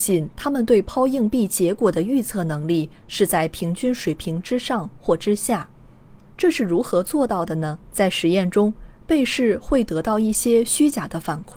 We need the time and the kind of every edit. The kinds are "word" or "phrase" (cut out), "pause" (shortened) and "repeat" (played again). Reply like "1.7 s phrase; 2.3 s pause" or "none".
6.3 s pause; 7.8 s pause

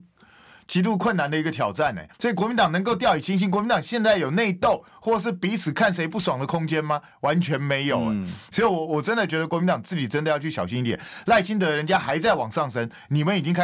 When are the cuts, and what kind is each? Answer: 2.1 s pause

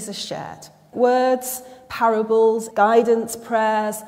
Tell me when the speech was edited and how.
0.9 s word; 2.7 s word

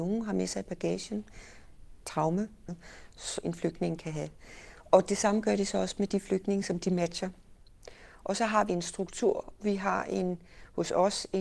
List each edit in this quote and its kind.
3.4 s word; 8.7 s word; 9.6 s word

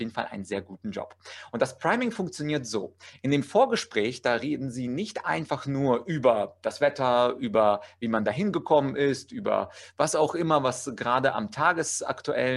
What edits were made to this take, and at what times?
none

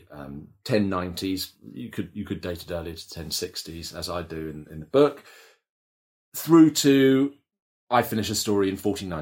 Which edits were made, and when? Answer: none

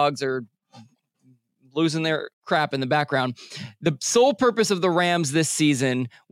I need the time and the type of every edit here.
2.3 s pause

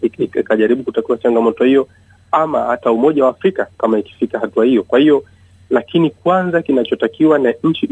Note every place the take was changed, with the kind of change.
none

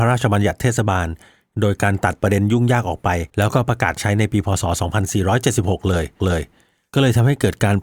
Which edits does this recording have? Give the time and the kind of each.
3.3 s pause; 6.2 s repeat

